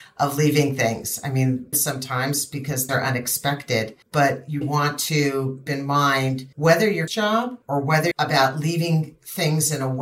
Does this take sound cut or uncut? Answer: cut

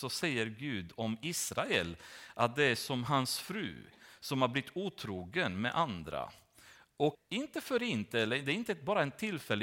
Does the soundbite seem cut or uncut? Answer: cut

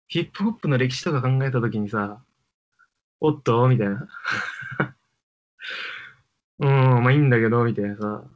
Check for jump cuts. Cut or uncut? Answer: uncut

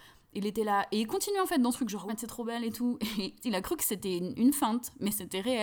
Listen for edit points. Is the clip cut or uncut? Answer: cut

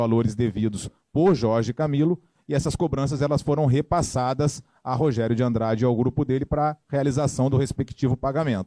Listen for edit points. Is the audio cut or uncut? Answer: uncut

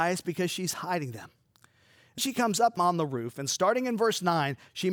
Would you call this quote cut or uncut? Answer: cut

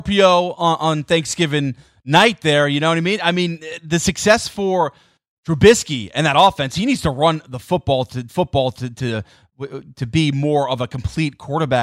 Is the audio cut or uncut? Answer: cut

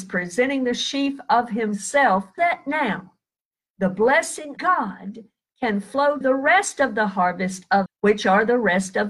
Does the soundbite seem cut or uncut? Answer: cut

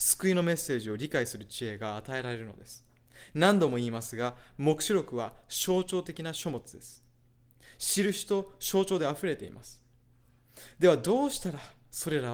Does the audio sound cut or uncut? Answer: uncut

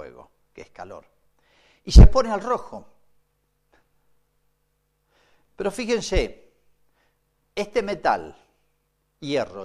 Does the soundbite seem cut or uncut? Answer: uncut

